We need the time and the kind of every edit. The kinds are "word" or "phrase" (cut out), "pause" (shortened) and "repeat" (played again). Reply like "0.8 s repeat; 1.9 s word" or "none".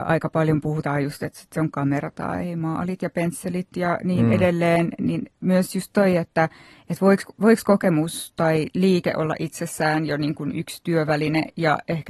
none